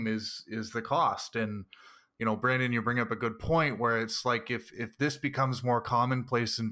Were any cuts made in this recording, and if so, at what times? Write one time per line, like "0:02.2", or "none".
none